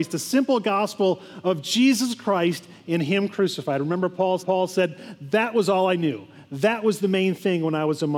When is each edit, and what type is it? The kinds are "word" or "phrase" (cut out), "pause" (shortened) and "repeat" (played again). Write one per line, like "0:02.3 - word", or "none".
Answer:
0:04.4 - repeat

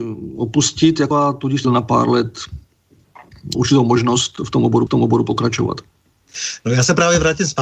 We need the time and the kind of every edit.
0:01.1 - word
0:01.6 - phrase
0:03.5 - word
0:04.9 - repeat

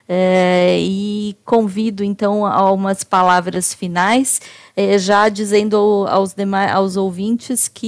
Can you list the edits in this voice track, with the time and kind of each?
none

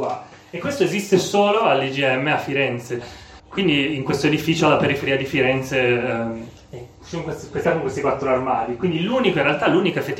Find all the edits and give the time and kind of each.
0:03.0 - word
0:03.4 - pause
0:06.6 - pause
0:07.6 - word

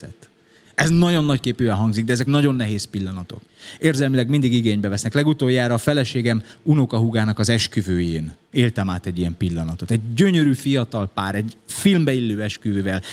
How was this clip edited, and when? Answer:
0:02.3 - word
0:08.4 - pause

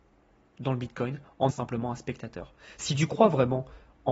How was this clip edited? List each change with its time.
0:01.5 - word

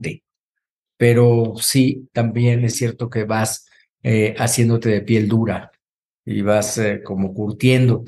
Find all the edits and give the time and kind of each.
none

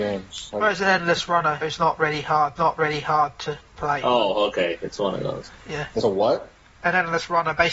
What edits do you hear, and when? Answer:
0:01.6 - word
0:02.6 - repeat
0:06.0 - phrase

